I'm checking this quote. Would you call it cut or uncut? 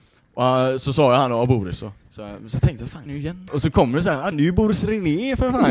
cut